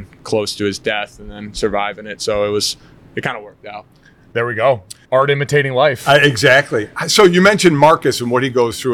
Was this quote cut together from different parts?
yes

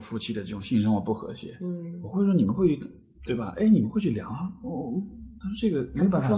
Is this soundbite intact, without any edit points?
yes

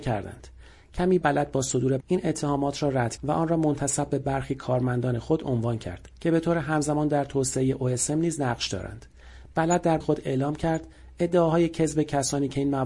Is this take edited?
yes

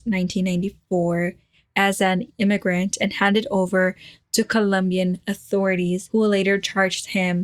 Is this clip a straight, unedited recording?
yes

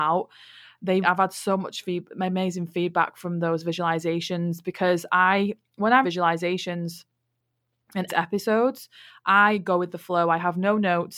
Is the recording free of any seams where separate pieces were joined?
no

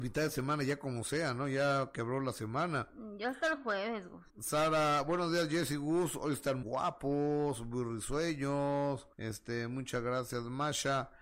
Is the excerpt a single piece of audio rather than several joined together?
no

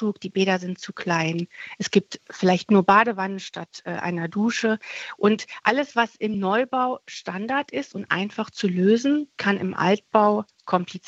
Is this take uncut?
yes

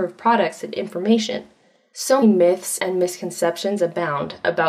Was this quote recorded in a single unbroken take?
no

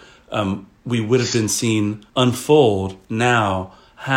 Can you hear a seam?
yes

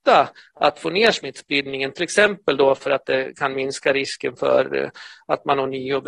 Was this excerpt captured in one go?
yes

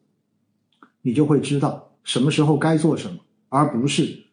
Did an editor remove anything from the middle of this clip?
yes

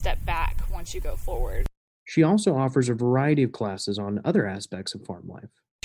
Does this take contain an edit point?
no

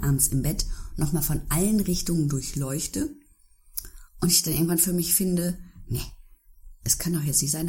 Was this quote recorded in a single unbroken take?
no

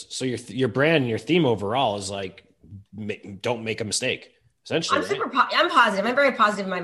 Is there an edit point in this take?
no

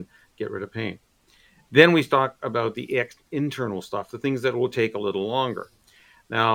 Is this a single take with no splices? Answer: yes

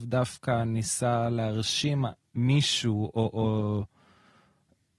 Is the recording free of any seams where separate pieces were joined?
yes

